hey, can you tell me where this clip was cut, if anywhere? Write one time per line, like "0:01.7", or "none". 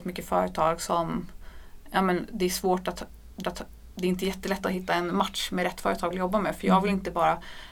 0:03.4
0:06.1